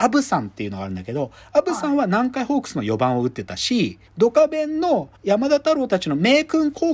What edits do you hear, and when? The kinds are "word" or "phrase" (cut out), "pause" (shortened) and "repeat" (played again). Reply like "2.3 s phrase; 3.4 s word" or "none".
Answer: 4.1 s pause; 5.2 s pause